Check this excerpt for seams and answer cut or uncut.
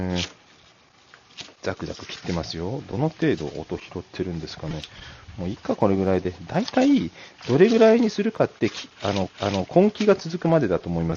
cut